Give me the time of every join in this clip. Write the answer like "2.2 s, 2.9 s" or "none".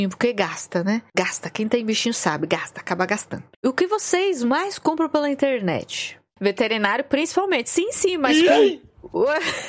none